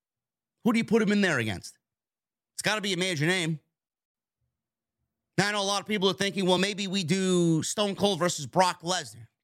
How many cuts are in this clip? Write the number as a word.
zero